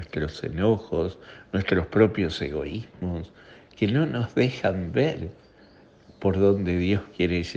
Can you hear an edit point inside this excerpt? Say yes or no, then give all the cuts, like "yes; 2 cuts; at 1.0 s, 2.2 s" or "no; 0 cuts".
no; 0 cuts